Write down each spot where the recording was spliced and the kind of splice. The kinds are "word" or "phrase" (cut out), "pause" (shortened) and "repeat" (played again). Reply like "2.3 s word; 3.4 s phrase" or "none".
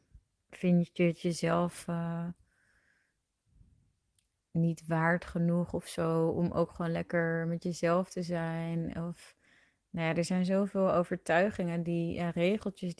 none